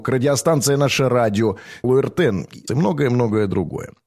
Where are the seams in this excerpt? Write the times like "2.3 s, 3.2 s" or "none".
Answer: 1.8 s, 2.7 s